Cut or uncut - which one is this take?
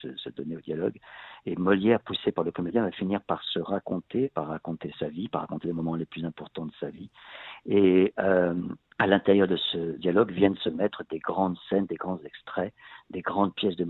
cut